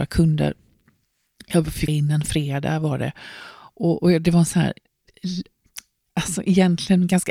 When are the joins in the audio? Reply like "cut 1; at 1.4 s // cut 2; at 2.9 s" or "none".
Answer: cut 1; at 1.9 s